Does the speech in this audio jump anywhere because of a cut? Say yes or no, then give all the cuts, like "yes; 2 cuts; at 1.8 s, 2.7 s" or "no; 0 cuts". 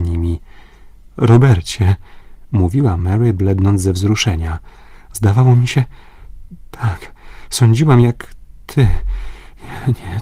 no; 0 cuts